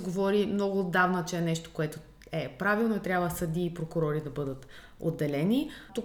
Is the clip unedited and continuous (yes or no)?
yes